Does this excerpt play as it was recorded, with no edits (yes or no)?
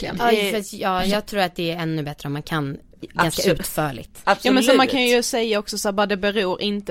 yes